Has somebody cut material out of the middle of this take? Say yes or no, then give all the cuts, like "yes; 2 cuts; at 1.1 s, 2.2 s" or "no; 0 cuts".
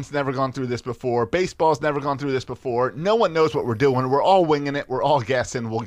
no; 0 cuts